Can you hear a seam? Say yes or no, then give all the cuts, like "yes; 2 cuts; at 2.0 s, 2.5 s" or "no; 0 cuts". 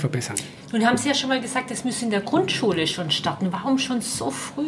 no; 0 cuts